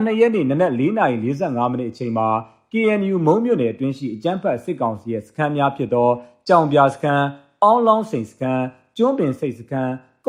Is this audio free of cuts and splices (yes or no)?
yes